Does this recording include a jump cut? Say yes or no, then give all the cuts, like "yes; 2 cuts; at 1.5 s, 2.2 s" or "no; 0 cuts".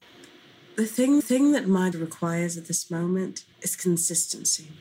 yes; 3 cuts; at 1.2 s, 1.9 s, 3.5 s